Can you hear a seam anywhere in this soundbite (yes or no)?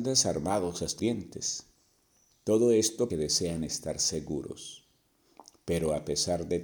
yes